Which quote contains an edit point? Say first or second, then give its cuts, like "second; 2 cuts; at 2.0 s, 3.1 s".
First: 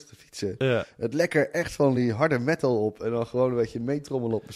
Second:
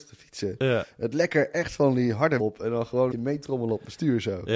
second; 2 cuts; at 2.4 s, 3.1 s